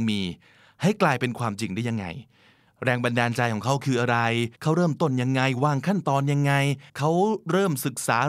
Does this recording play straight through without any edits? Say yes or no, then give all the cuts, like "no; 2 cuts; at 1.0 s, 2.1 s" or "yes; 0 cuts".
no; 2 cuts; at 4.5 s, 6.9 s